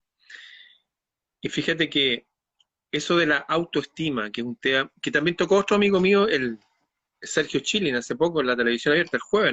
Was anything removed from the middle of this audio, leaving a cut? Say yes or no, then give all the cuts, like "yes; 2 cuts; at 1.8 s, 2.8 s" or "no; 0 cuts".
no; 0 cuts